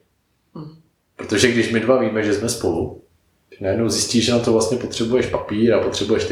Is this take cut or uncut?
uncut